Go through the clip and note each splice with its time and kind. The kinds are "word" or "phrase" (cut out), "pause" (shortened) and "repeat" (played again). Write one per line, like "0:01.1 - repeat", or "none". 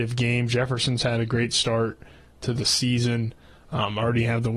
none